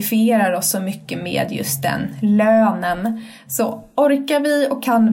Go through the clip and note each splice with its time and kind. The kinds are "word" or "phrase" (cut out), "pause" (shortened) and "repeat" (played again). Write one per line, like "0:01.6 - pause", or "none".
none